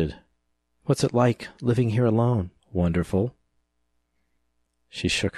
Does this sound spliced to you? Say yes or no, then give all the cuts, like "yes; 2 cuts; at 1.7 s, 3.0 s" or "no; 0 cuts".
yes; 1 cut; at 2.6 s